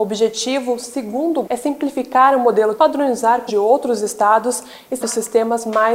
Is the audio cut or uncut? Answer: cut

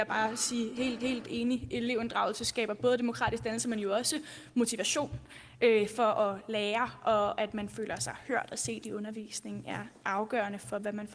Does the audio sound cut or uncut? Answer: cut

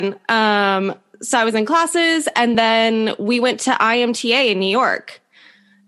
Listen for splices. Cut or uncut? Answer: uncut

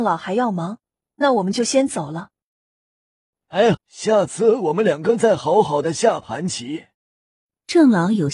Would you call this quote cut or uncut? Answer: cut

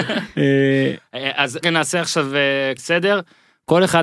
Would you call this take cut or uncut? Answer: cut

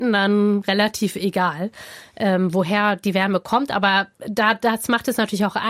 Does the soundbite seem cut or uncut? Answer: uncut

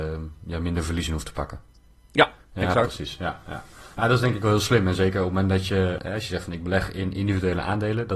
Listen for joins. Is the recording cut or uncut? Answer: uncut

